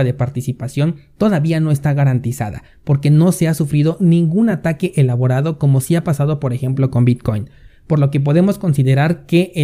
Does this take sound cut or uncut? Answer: uncut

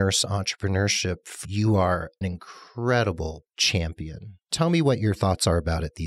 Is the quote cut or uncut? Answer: cut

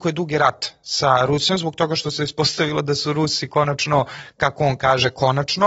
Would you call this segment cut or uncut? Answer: uncut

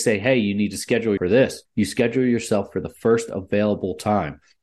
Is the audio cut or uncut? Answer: cut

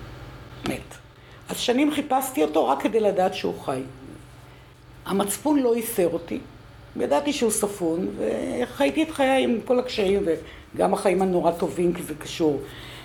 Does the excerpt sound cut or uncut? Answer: uncut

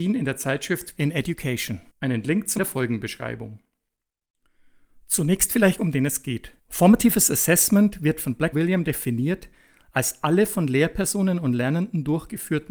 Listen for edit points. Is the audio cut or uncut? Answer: cut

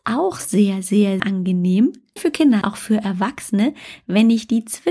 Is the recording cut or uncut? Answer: cut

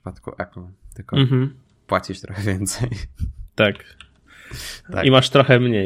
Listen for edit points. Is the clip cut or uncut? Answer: uncut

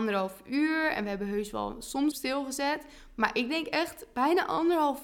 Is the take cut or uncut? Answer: cut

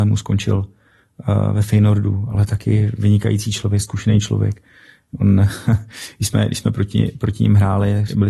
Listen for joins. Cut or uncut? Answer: uncut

